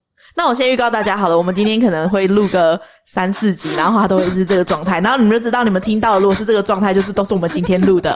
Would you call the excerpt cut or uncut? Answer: uncut